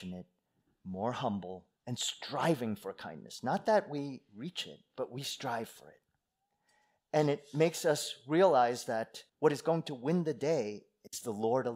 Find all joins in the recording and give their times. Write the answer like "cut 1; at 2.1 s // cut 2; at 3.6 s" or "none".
cut 1; at 1.8 s // cut 2; at 9.3 s